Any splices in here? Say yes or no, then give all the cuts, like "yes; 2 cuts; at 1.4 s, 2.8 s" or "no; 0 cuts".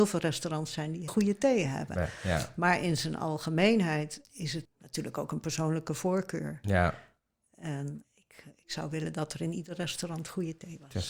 yes; 4 cuts; at 1.1 s, 4.2 s, 4.6 s, 8.0 s